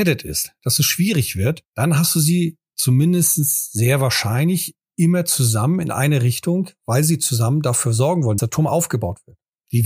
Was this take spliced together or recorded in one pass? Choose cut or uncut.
cut